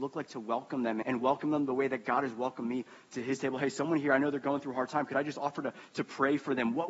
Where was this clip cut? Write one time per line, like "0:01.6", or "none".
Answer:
0:01.0

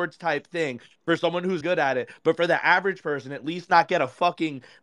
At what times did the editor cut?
0:01.6

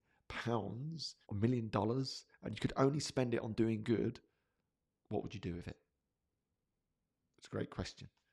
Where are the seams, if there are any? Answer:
0:01.2

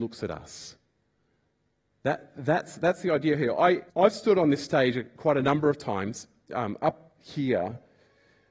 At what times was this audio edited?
0:03.9

